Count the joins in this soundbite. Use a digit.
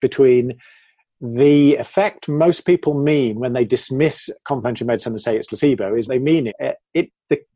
3